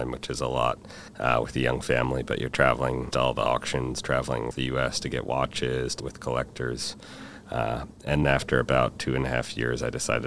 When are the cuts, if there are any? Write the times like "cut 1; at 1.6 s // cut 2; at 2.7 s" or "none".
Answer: cut 1; at 1.1 s // cut 2; at 3.1 s // cut 3; at 4.5 s // cut 4; at 6.0 s // cut 5; at 8.2 s

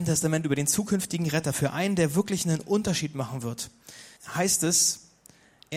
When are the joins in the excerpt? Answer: cut 1; at 4.2 s

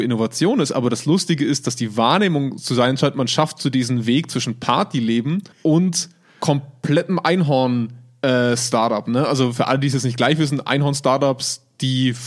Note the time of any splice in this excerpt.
cut 1; at 5.5 s

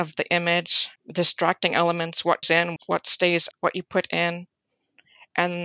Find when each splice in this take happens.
cut 1; at 1.0 s // cut 2; at 2.4 s // cut 3; at 2.8 s // cut 4; at 3.5 s

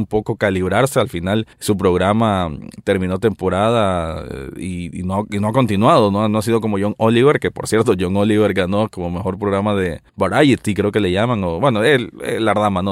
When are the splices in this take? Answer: cut 1; at 1.5 s // cut 2; at 10.1 s

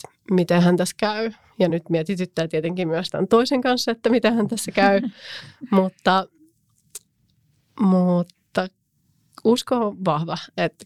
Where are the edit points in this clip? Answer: none

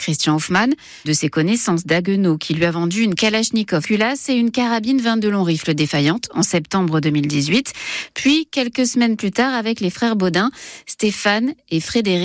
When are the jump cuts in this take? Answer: cut 1; at 1.0 s // cut 2; at 3.8 s

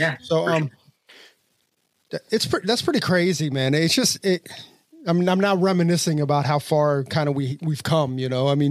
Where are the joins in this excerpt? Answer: none

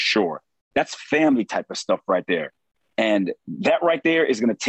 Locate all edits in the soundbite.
none

